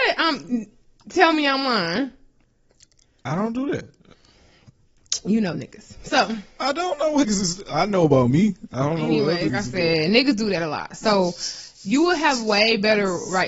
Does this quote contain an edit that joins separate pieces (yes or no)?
yes